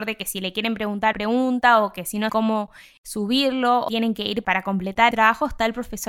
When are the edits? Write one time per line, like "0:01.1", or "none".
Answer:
0:01.1
0:02.3
0:03.0
0:03.9
0:04.4
0:05.1